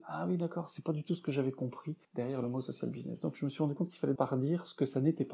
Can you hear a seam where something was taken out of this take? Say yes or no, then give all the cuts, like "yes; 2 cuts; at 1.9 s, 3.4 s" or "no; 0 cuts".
yes; 2 cuts; at 2.0 s, 4.1 s